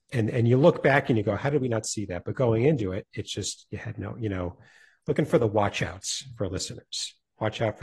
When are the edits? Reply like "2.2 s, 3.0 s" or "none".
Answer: none

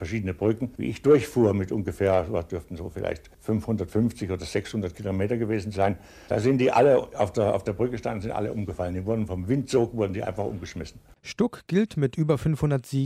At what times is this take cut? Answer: none

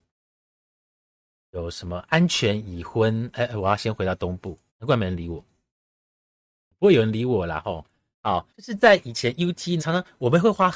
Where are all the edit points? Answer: 4.7 s, 8.5 s, 9.8 s

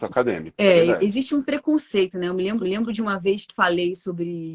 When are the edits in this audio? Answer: 1.4 s, 2.6 s, 3.5 s

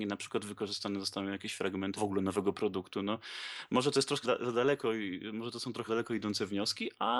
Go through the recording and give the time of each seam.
2.0 s, 4.2 s, 5.9 s

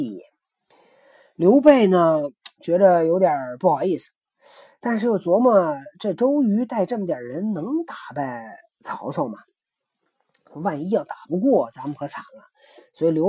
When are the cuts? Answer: none

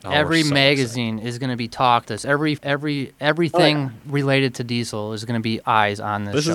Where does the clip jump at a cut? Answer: 2.0 s, 2.6 s, 5.6 s

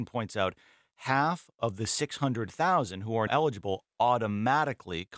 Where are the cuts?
3.3 s

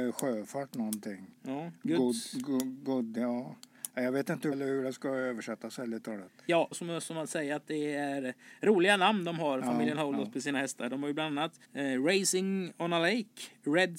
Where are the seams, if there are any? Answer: 1.3 s, 4.5 s, 6.7 s, 11.6 s

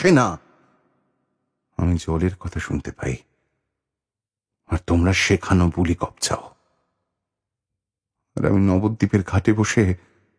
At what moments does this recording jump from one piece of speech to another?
none

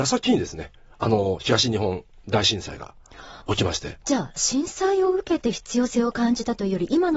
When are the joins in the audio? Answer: 3.4 s, 4.0 s

